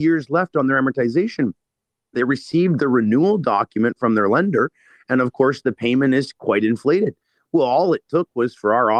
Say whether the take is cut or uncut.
uncut